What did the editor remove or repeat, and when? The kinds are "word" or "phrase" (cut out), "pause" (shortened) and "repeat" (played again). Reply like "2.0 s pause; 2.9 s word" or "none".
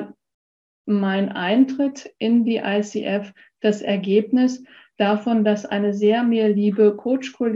none